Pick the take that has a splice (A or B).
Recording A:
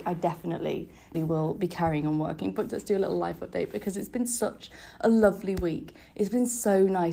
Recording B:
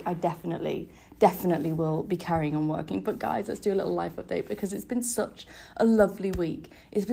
A